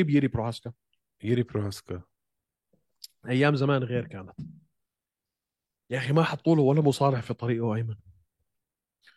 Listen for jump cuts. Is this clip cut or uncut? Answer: uncut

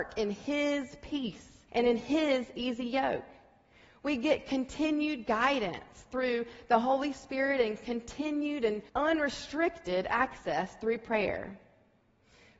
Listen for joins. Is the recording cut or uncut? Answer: cut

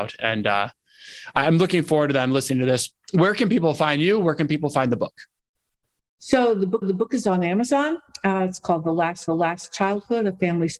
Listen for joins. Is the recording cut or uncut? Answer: cut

